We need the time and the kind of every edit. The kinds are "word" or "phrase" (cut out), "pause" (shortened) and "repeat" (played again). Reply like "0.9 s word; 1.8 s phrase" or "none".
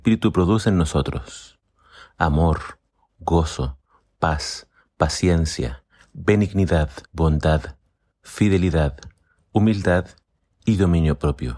7.0 s pause

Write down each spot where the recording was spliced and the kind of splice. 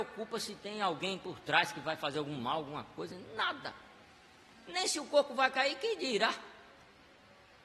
none

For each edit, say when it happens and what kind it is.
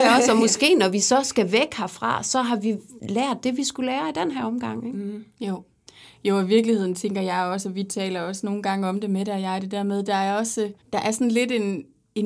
5.9 s pause; 10.8 s pause

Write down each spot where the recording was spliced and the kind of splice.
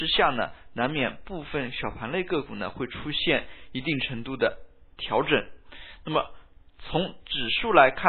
none

